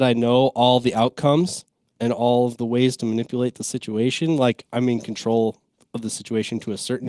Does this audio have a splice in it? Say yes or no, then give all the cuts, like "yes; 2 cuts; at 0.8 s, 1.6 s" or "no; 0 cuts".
no; 0 cuts